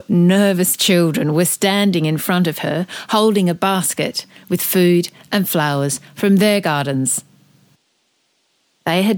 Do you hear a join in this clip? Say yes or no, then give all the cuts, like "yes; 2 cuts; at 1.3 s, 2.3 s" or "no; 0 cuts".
no; 0 cuts